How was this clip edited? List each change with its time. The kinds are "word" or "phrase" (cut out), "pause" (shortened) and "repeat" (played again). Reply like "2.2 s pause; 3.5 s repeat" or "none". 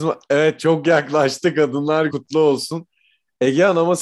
2.1 s word